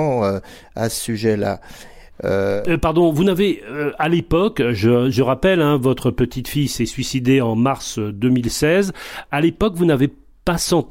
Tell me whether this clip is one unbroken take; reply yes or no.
yes